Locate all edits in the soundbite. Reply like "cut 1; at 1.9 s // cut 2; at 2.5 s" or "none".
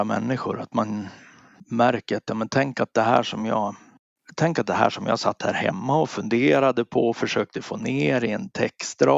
none